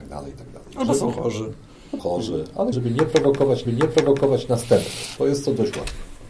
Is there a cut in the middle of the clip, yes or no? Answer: yes